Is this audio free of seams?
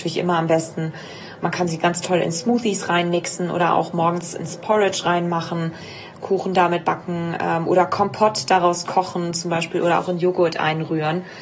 yes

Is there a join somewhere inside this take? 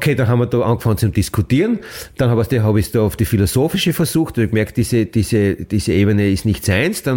no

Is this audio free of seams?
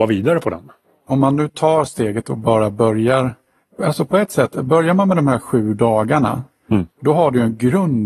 no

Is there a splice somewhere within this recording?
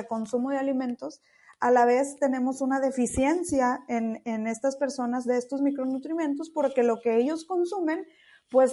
no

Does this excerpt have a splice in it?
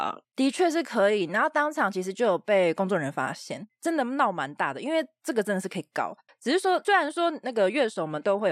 no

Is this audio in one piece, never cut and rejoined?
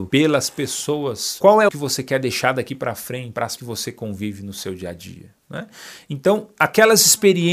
no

